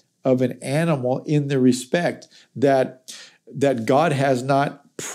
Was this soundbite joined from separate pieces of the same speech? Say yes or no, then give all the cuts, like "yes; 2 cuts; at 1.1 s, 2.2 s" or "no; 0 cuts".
no; 0 cuts